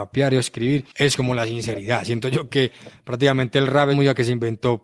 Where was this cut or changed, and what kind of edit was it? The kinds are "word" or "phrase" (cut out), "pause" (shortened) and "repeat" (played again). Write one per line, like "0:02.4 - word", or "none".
0:03.9 - word